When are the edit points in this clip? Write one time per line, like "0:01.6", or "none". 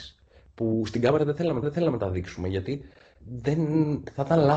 0:01.6
0:03.2